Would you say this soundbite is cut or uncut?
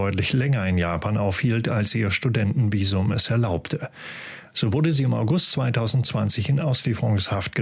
uncut